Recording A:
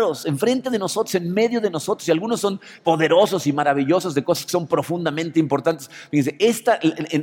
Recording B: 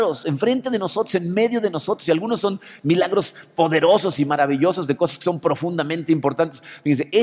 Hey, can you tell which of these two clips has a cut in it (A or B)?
A